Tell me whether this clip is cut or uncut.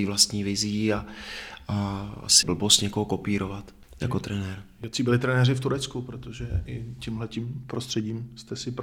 cut